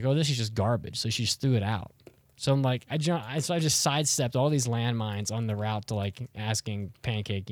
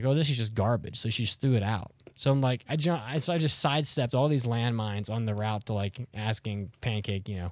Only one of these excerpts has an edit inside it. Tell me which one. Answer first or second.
second